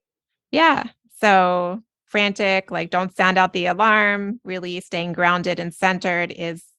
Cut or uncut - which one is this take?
uncut